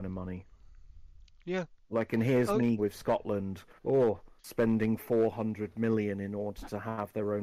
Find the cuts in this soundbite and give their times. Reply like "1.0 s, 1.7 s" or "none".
2.8 s, 3.8 s, 4.4 s